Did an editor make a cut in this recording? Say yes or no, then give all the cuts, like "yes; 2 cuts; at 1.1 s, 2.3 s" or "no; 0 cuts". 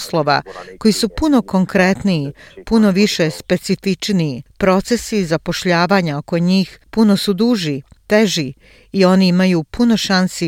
no; 0 cuts